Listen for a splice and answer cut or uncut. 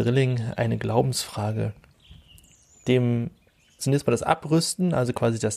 cut